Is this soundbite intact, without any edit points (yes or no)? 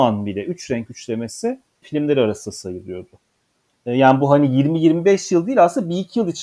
no